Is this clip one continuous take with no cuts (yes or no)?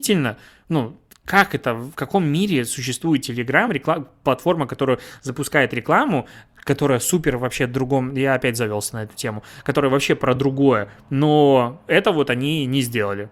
yes